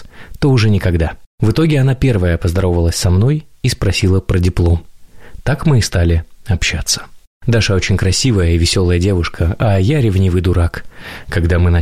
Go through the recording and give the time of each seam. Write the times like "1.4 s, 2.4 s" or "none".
none